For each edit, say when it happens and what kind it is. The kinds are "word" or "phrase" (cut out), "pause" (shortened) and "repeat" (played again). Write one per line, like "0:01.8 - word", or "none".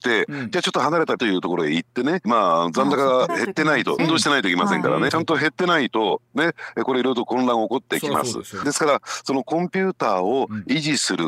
0:01.2 - word
0:02.2 - phrase
0:03.3 - word
0:04.0 - word
0:05.1 - phrase
0:08.6 - word